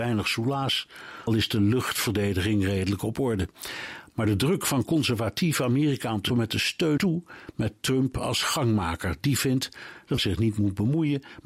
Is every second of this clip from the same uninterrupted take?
no; 4 cuts; at 1.3 s, 6.3 s, 7.0 s, 10.2 s

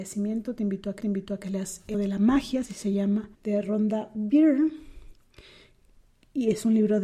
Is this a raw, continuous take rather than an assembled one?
no; 3 cuts; at 1.0 s, 1.9 s, 3.3 s

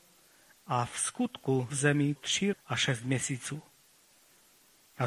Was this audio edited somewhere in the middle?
yes; 3 cuts; at 1.7 s, 2.2 s, 2.5 s

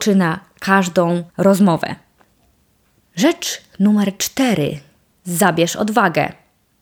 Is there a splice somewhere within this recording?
yes; 2 cuts; at 1.3 s, 5.1 s

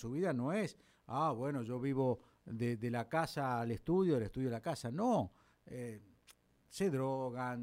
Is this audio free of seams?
yes; 0 cuts

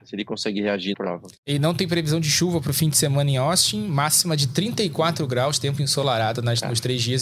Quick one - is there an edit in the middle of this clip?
yes; 2 cuts; at 0.9 s, 1.4 s

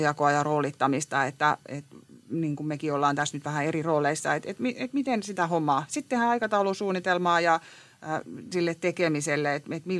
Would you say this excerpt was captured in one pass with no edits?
no; 1 cut; at 8.5 s

